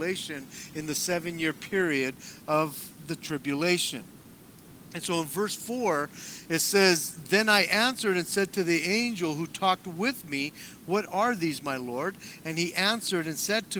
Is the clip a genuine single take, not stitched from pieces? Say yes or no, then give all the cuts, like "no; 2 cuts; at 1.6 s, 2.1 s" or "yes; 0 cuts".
yes; 0 cuts